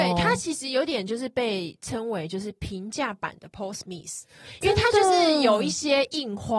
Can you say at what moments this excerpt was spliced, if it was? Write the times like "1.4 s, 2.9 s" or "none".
none